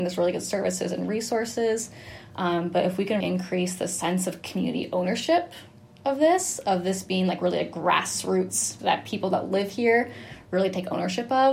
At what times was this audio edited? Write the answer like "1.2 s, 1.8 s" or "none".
3.2 s, 8.8 s